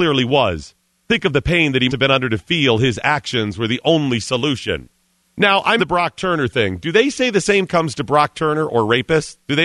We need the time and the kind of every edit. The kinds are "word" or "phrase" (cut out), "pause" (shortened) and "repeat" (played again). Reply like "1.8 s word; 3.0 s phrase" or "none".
1.9 s word; 5.2 s pause; 5.8 s word; 7.7 s phrase